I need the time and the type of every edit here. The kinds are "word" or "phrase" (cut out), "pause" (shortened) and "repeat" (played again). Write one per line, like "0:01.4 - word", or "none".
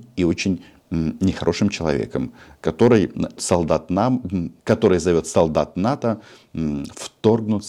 0:03.4 - word
0:04.6 - pause